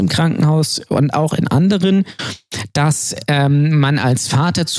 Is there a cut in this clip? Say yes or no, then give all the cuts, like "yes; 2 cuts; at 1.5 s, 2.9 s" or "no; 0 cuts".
no; 0 cuts